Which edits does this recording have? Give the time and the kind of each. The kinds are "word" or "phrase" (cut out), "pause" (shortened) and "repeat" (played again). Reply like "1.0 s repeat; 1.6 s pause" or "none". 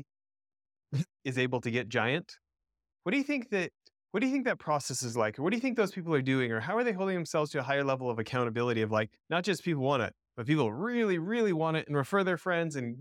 2.9 s word; 3.9 s pause; 9.2 s pause